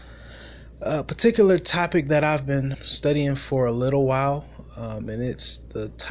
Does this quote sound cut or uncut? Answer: cut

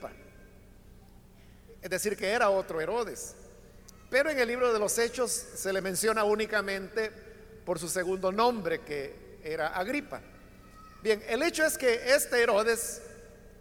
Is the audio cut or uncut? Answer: uncut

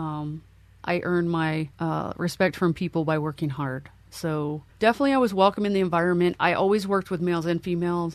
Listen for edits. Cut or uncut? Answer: cut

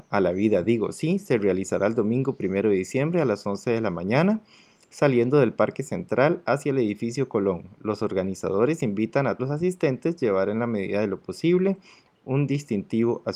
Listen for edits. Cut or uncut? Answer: cut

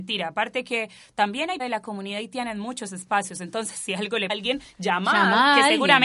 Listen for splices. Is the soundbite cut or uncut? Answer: cut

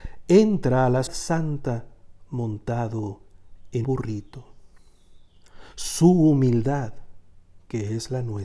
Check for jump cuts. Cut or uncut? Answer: cut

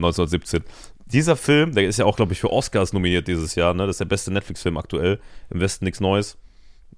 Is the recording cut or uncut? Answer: uncut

